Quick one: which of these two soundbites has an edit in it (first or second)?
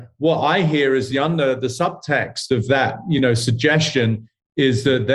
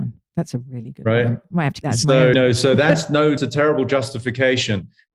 second